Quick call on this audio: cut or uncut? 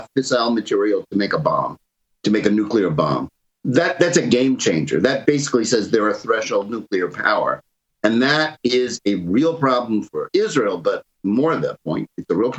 uncut